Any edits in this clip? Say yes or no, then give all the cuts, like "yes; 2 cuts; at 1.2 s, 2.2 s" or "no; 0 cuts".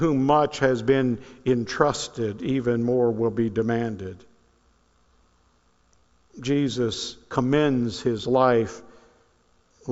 no; 0 cuts